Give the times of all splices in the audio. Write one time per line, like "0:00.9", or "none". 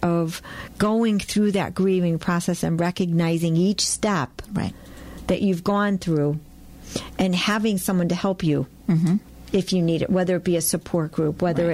none